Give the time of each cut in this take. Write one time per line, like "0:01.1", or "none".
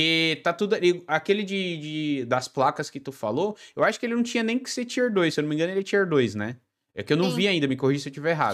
none